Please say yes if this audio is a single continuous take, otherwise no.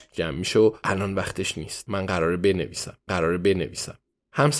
no